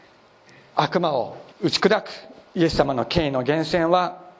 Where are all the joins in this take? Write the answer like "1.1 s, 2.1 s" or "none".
1.5 s, 2.5 s